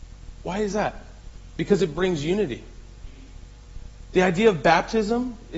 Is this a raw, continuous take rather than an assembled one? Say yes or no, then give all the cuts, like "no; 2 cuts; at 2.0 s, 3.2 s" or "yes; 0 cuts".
yes; 0 cuts